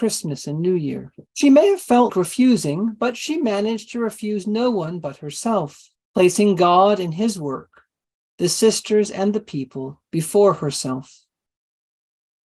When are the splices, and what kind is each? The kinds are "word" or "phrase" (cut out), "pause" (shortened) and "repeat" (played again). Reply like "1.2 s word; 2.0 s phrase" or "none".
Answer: 1.3 s pause; 2.1 s word; 6.0 s pause